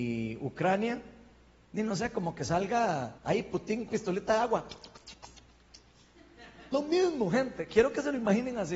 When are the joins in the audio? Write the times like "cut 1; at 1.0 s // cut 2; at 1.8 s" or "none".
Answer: cut 1; at 3.2 s // cut 2; at 3.9 s // cut 3; at 6.7 s

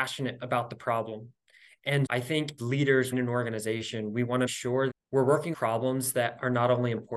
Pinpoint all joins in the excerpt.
cut 1; at 2.1 s // cut 2; at 2.6 s // cut 3; at 3.1 s // cut 4; at 4.5 s // cut 5; at 4.9 s // cut 6; at 5.5 s

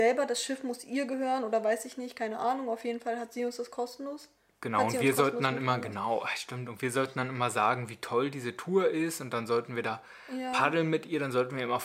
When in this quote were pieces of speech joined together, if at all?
none

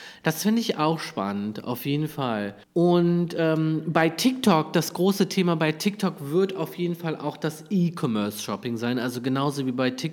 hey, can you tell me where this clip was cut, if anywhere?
cut 1; at 2.6 s

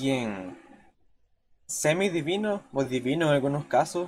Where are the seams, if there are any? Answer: none

